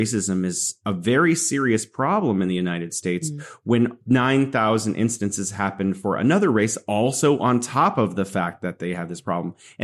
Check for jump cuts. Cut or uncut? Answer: uncut